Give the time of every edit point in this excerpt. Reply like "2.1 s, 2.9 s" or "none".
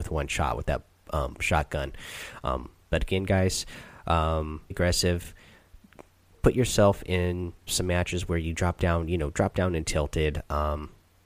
1.4 s, 4.7 s, 7.7 s

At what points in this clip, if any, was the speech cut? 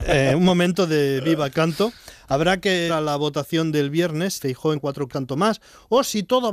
1.5 s, 2.9 s, 4.4 s, 4.8 s, 5.1 s

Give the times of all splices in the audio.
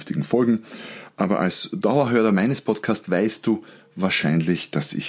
none

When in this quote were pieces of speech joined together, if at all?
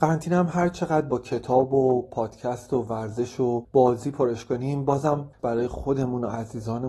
5.4 s

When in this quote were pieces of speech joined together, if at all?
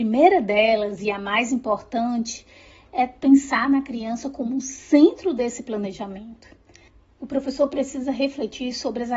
none

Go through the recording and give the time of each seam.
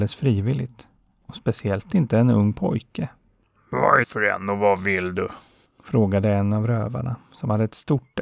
4.0 s

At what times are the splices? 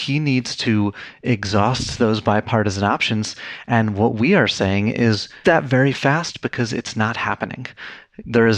5.4 s

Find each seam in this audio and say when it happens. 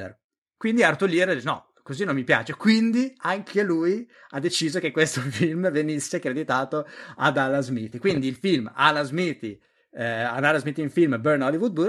none

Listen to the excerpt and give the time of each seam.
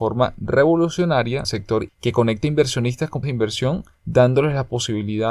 1.4 s, 1.9 s, 3.2 s

